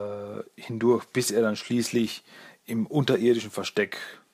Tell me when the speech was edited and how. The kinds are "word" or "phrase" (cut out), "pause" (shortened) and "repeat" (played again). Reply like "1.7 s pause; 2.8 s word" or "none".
none